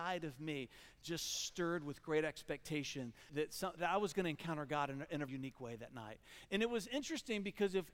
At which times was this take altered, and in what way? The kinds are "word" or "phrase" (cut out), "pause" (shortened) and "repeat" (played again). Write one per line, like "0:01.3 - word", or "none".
0:03.3 - word
0:03.8 - word
0:05.3 - word